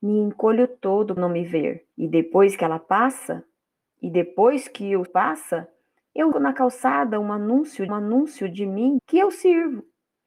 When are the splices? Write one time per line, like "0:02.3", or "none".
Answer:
0:01.2
0:01.9
0:05.1
0:06.3
0:07.9
0:09.0